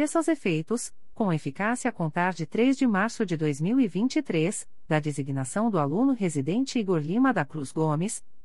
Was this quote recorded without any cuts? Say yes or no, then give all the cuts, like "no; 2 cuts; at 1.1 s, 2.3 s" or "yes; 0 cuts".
yes; 0 cuts